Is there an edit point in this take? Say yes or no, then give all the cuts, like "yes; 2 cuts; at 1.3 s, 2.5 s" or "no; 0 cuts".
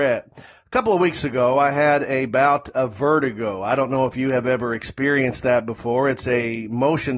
no; 0 cuts